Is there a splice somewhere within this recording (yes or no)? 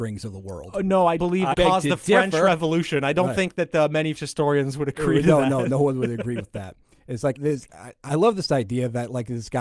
yes